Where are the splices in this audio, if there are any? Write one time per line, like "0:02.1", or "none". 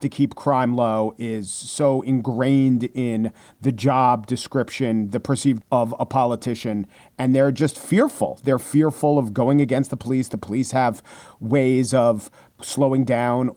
0:05.6